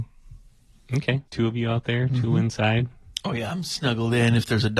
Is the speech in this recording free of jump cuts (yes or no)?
no